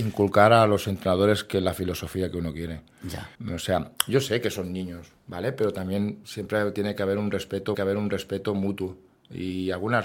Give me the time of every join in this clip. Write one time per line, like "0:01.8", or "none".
0:03.3
0:06.2
0:07.7